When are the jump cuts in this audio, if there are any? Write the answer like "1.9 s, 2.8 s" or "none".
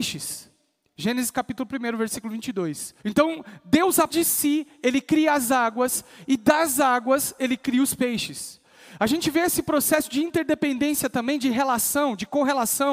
3.0 s, 4.1 s